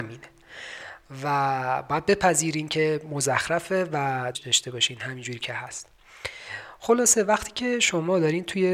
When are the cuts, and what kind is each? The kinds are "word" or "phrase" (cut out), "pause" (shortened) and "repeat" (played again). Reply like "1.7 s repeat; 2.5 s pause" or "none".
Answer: 4.3 s word